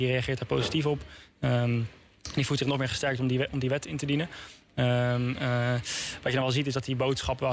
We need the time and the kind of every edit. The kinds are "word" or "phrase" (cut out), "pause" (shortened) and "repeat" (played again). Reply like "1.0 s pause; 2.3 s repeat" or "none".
none